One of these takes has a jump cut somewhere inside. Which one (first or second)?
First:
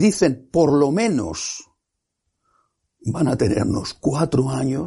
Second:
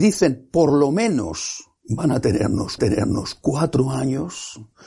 second